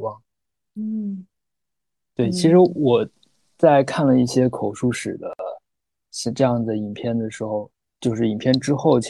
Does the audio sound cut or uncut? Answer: uncut